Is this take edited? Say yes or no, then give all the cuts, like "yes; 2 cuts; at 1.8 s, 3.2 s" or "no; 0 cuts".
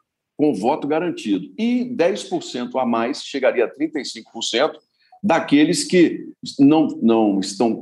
no; 0 cuts